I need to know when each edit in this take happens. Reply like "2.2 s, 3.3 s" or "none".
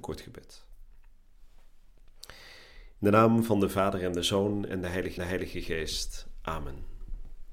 5.2 s